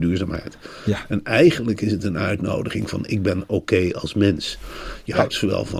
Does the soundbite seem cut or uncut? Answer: uncut